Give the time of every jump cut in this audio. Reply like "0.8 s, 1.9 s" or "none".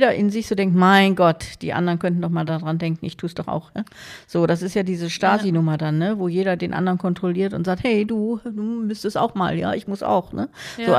none